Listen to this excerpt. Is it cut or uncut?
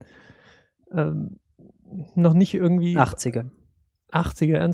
uncut